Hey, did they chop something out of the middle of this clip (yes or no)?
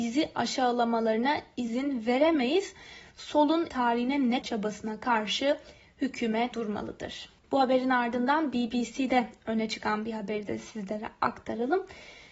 yes